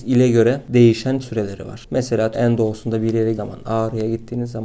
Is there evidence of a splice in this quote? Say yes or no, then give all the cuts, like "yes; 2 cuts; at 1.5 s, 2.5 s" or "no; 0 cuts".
yes; 3 cuts; at 1.2 s, 2.3 s, 3.3 s